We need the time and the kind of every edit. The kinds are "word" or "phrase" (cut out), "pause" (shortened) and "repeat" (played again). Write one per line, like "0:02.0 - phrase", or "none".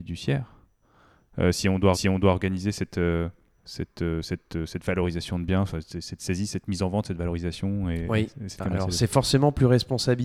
0:01.9 - repeat